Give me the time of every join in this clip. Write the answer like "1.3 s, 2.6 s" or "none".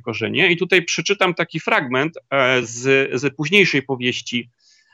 none